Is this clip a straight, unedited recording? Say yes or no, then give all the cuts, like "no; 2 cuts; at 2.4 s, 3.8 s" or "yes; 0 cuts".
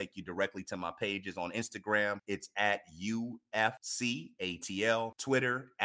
yes; 0 cuts